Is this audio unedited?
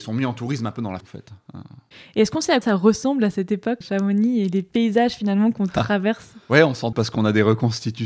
no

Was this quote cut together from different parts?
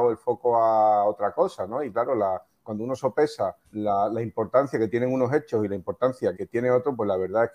yes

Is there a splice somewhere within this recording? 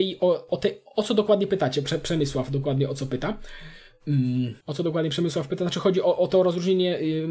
yes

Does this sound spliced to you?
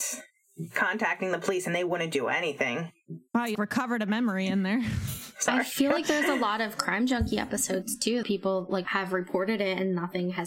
yes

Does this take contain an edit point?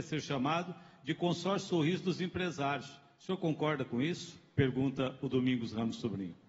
no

